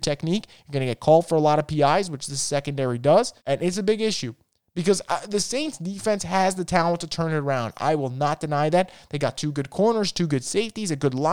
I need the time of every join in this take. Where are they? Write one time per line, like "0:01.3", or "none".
0:03.4